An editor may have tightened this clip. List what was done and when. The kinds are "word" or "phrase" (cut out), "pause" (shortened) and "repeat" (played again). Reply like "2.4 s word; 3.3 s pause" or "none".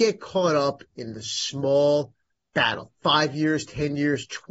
2.9 s pause